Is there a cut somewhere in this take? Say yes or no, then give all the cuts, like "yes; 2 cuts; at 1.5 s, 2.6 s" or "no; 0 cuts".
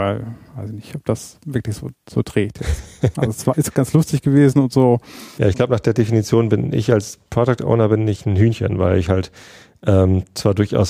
no; 0 cuts